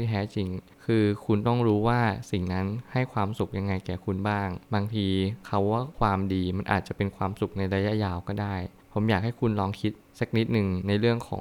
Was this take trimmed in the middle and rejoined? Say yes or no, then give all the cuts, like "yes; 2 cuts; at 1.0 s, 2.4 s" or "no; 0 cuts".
yes; 1 cut; at 4.6 s